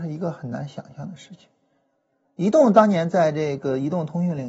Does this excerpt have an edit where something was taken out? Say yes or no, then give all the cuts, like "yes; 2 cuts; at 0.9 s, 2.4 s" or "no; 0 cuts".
no; 0 cuts